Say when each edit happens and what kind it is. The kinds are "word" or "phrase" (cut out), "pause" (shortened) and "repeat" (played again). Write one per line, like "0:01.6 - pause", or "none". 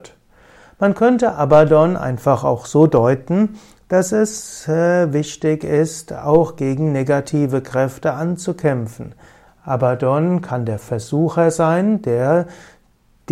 none